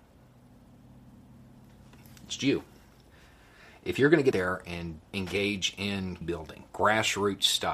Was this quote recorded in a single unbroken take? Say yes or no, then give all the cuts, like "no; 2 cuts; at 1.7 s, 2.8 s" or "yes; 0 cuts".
no; 4 cuts; at 2.4 s, 4.3 s, 5.1 s, 6.2 s